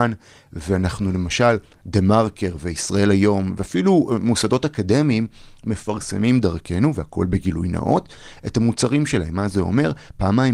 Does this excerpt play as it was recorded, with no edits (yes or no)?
yes